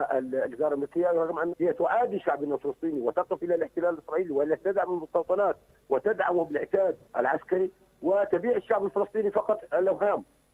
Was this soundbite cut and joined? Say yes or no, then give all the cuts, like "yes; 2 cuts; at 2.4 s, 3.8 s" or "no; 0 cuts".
yes; 2 cuts; at 1.5 s, 7.0 s